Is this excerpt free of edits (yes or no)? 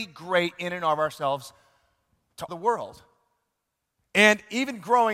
no